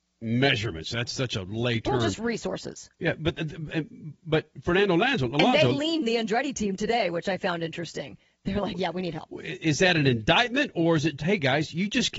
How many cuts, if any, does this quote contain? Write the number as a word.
three